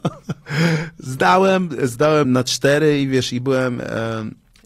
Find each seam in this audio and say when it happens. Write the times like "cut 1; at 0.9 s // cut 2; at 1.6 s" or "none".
cut 1; at 2.2 s